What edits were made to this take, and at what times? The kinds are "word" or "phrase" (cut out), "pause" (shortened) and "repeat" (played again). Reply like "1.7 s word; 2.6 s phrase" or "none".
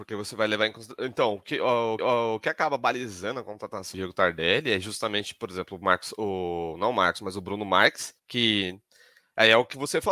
2.0 s repeat; 3.9 s word; 8.2 s pause